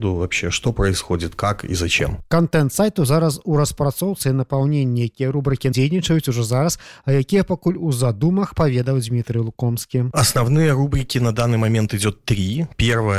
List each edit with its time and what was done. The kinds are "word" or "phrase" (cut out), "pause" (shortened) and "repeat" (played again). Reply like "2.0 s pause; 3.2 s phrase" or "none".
5.7 s word